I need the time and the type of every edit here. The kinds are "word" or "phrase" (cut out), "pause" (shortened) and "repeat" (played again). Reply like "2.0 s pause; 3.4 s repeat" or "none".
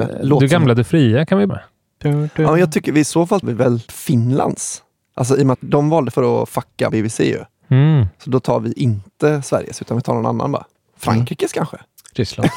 1.5 s word; 3.4 s word; 3.9 s word; 5.5 s word; 6.1 s word; 6.9 s word